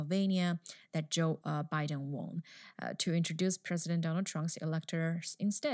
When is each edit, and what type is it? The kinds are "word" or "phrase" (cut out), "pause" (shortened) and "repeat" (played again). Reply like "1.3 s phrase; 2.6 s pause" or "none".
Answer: none